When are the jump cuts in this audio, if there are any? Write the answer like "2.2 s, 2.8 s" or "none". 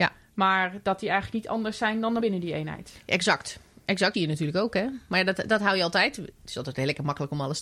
2.2 s, 4.1 s